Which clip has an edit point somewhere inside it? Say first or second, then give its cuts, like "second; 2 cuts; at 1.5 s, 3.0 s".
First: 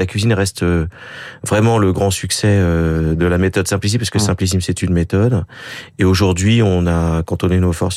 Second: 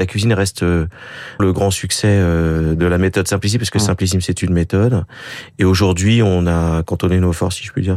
second; 1 cut; at 1.4 s